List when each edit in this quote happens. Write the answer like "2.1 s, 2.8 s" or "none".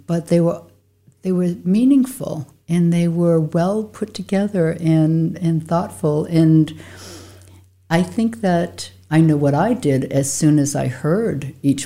none